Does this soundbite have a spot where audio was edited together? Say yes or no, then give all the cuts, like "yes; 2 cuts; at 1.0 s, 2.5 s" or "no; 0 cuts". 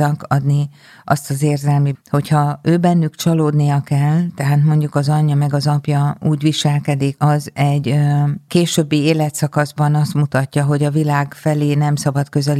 yes; 2 cuts; at 1.9 s, 7.2 s